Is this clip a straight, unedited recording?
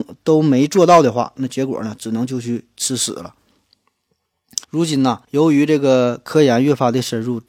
no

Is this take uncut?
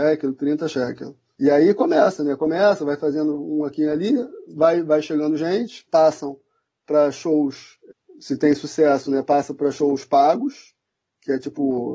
yes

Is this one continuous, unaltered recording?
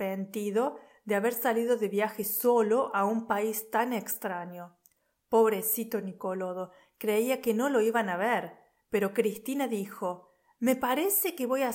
yes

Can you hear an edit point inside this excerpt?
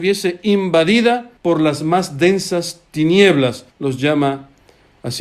yes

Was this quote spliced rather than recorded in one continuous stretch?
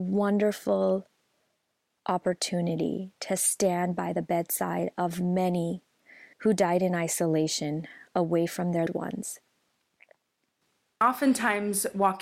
yes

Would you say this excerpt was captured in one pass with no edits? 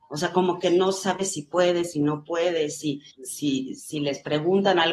no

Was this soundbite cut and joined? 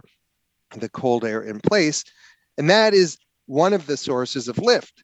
no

